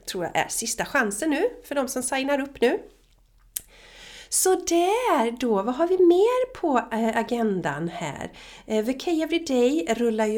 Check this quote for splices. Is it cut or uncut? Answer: uncut